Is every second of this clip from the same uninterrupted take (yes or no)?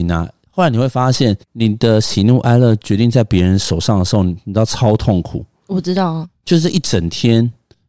no